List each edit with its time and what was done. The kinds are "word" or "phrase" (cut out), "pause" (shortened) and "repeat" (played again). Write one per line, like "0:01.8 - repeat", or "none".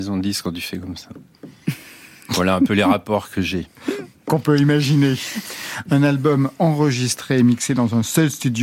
none